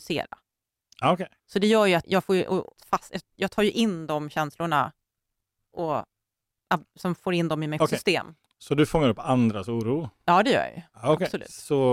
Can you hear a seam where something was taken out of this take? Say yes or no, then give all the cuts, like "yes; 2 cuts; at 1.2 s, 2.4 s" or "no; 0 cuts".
yes; 4 cuts; at 1.4 s, 2.0 s, 2.8 s, 7.8 s